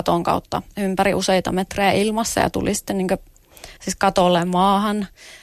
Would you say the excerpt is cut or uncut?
cut